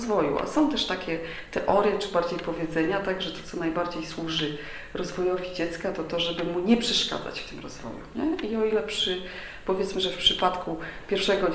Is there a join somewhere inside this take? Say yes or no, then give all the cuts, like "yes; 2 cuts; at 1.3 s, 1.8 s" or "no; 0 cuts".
no; 0 cuts